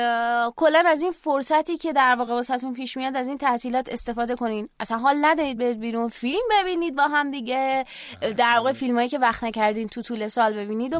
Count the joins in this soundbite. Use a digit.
0